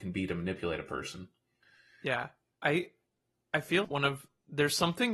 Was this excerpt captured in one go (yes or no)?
no